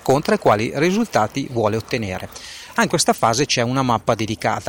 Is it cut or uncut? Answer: cut